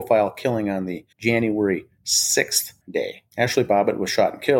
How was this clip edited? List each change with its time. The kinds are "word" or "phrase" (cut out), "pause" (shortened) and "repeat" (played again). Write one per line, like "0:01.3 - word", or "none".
0:01.1 - pause
0:02.8 - phrase
0:03.3 - pause